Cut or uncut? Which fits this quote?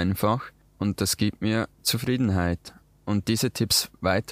cut